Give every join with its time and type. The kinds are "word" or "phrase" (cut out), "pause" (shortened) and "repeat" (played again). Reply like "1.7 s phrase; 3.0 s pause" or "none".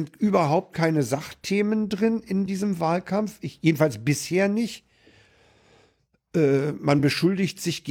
none

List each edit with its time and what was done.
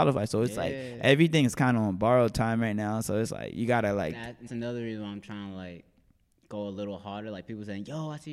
4.5 s word

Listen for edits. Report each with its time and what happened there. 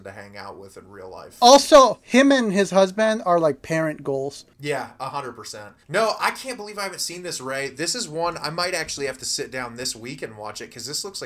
5.8 s pause

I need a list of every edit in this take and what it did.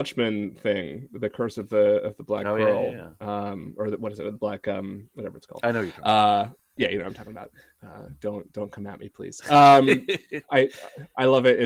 none

